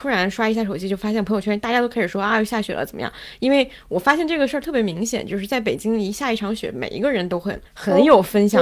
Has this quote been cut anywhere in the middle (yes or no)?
yes